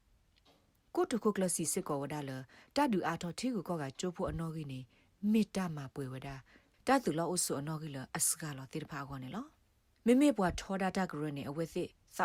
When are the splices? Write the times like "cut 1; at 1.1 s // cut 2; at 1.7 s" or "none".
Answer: none